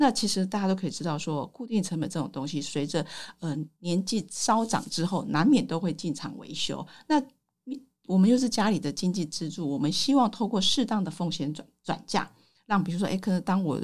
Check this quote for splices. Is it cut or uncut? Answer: uncut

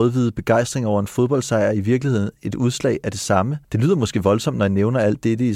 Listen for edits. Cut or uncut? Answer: cut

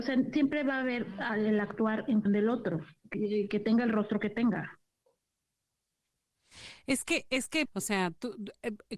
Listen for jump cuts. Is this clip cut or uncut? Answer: cut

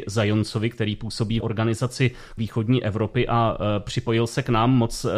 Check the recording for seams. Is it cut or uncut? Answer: cut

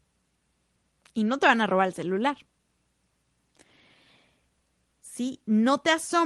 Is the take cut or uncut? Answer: uncut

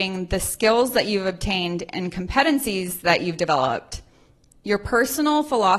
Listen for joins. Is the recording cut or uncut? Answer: uncut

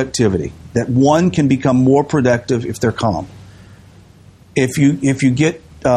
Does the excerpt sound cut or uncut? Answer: uncut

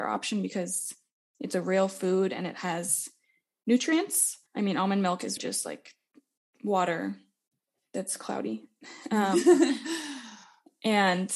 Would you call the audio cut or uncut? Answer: cut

